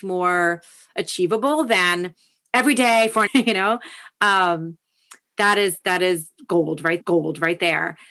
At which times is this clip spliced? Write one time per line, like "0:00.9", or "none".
0:03.3
0:07.0